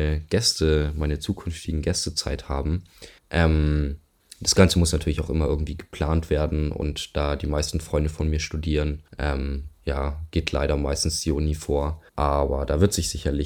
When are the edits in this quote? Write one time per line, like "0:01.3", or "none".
0:03.2
0:09.1
0:12.1